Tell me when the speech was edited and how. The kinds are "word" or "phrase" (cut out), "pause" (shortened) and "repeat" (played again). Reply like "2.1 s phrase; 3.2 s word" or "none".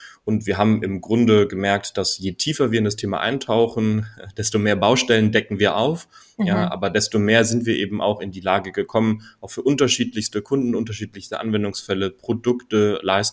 none